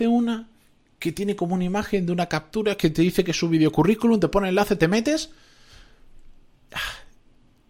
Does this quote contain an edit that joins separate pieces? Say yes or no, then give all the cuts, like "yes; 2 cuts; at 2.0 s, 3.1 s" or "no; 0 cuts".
no; 0 cuts